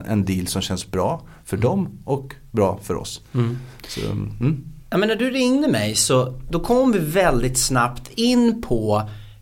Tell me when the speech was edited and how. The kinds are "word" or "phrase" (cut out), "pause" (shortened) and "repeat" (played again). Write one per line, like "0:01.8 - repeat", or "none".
none